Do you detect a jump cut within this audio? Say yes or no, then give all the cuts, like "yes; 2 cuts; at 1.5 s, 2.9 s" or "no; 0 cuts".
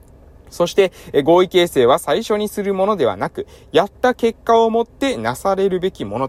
no; 0 cuts